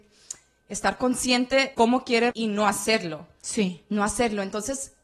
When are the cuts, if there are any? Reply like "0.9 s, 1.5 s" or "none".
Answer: 1.7 s, 2.3 s